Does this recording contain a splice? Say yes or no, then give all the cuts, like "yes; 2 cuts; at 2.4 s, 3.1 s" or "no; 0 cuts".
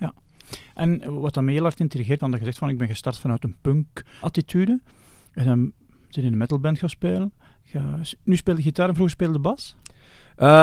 yes; 2 cuts; at 2.2 s, 4.2 s